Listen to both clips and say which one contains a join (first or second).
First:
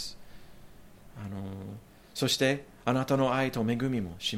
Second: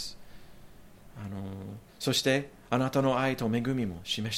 second